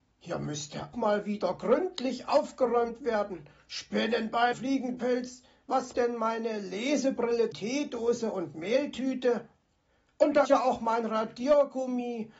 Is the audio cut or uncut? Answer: cut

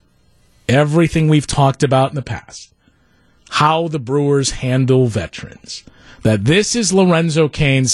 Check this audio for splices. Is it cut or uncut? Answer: uncut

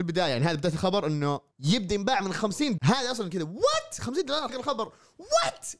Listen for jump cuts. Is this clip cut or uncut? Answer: cut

